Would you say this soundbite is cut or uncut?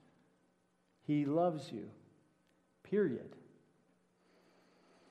uncut